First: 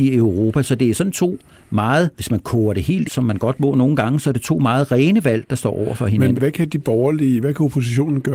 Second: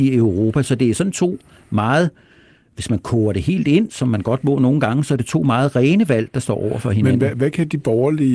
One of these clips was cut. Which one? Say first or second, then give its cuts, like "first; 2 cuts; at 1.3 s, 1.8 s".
first; 3 cuts; at 2.1 s, 3.1 s, 6.4 s